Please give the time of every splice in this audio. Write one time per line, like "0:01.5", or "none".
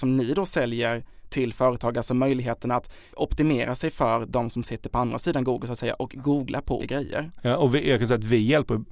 0:06.8